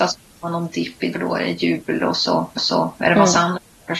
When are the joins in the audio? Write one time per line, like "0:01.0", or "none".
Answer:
0:01.1
0:02.6